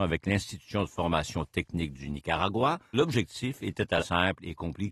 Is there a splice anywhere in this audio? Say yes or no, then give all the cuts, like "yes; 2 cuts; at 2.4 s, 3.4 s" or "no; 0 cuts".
yes; 2 cuts; at 2.9 s, 4.0 s